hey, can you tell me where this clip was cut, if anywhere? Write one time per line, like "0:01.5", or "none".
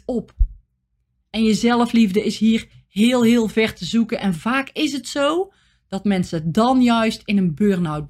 none

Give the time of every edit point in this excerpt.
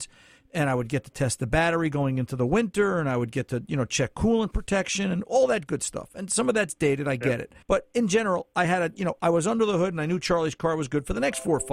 0:07.6

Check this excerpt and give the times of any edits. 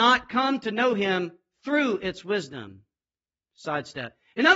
none

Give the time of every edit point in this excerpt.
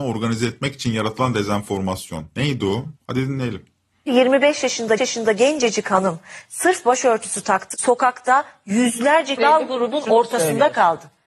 0:03.0
0:05.0
0:07.7
0:09.4

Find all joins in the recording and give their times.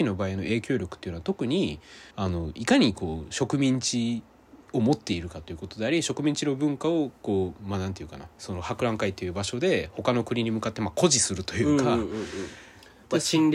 0:02.1
0:04.6
0:08.3

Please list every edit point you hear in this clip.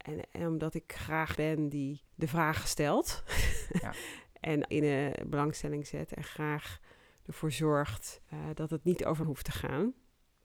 0:01.3
0:02.1
0:04.7
0:08.3
0:09.2

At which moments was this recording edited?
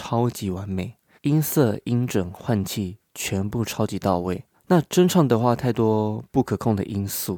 0:01.2
0:04.5

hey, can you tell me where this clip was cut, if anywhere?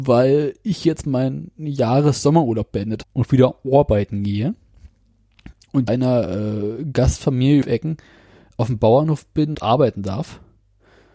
0:03.0
0:05.9
0:07.6
0:09.5

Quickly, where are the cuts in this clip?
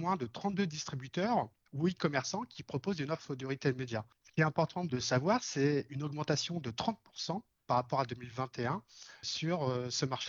none

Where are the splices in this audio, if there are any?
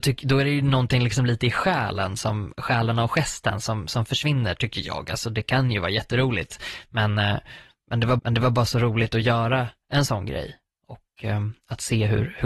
0:08.2

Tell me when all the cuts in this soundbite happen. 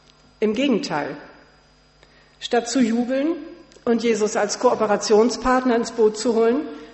none

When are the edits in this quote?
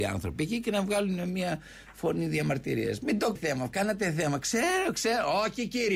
0:03.4

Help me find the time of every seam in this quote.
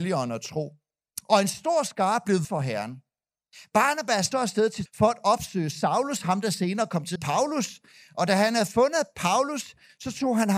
0:02.4
0:04.3
0:04.9
0:07.2

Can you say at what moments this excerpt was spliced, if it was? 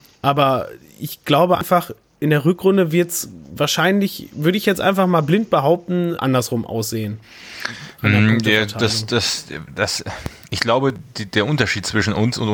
0:06.2

